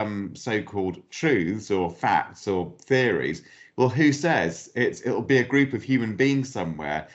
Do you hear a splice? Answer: no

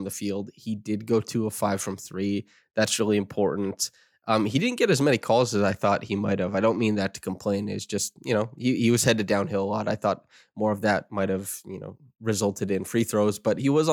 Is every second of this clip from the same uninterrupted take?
yes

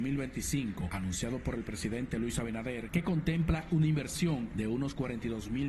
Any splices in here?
no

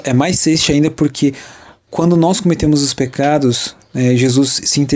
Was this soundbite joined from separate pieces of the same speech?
no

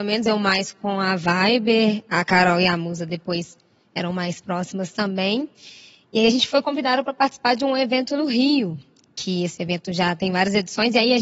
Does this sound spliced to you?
no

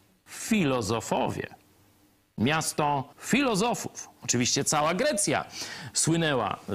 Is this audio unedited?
no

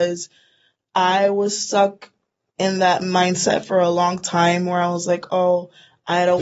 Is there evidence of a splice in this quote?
no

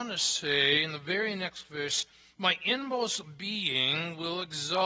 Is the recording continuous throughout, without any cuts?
yes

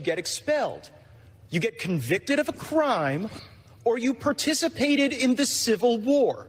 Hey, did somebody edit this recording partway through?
no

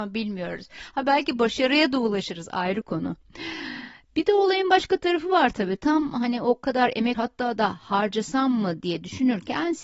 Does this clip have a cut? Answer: yes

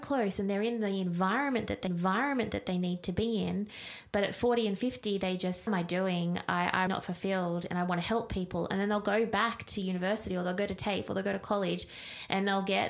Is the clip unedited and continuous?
no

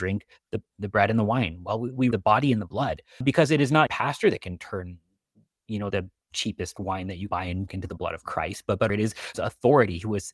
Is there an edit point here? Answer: yes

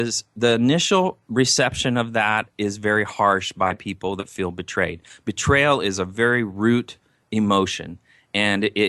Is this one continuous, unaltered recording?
yes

